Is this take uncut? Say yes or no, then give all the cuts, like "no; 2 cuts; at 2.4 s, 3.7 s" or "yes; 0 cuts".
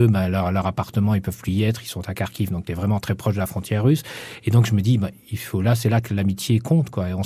no; 1 cut; at 2.7 s